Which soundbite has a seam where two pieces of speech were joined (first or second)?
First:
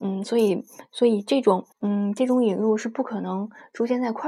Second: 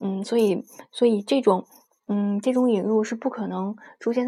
first